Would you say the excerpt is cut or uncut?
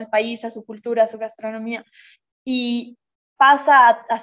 uncut